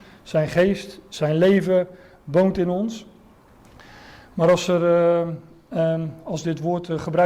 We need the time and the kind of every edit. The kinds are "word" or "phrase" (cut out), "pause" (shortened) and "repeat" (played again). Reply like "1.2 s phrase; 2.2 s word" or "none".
none